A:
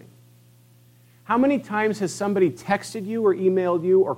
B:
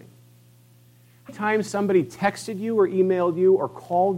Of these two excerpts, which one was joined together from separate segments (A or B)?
B